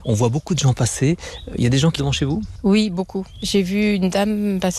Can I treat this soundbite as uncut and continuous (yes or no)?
no